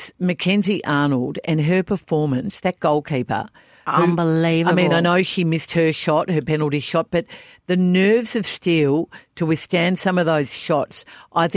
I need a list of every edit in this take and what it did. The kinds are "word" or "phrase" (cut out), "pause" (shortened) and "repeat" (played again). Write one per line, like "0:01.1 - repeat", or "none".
none